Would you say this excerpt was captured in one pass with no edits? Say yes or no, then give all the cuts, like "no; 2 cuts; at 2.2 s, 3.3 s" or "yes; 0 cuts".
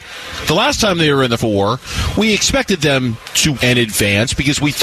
no; 2 cuts; at 1.4 s, 3.5 s